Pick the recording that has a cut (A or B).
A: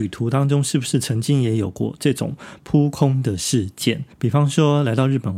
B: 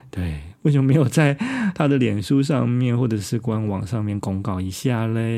A